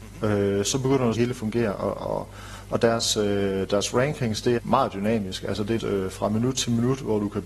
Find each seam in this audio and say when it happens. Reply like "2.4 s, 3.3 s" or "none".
1.1 s, 4.6 s, 5.8 s